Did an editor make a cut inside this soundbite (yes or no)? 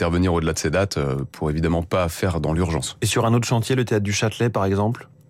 no